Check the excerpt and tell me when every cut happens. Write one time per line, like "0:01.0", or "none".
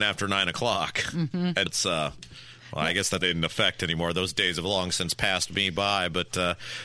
0:01.7
0:03.2